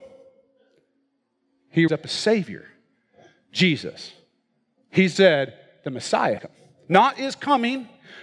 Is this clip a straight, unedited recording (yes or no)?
no